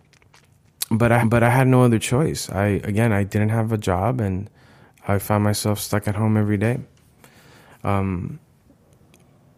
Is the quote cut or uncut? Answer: cut